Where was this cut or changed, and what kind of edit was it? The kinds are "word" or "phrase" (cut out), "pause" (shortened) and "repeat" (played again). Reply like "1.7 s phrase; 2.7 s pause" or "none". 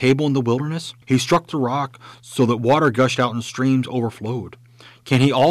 1.0 s pause

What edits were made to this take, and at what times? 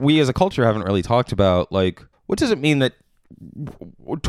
2.1 s pause

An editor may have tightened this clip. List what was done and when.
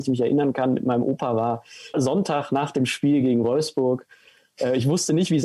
1.9 s phrase

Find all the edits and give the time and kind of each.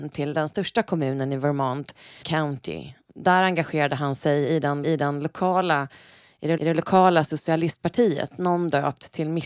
2.2 s word; 4.8 s repeat; 6.6 s repeat

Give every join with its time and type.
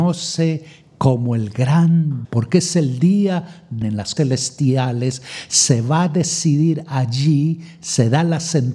2.2 s word; 3.8 s phrase; 4.2 s word

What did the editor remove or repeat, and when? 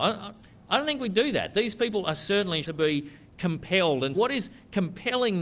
2.6 s word; 4.1 s word

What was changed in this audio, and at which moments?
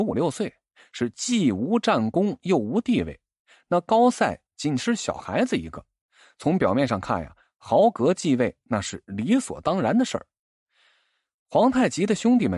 4.5 s phrase

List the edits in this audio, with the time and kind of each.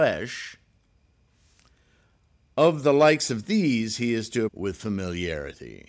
4.5 s phrase

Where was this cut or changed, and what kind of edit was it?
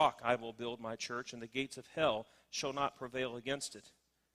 none

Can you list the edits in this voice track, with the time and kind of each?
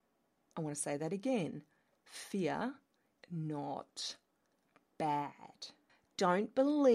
3.2 s word; 5.9 s pause

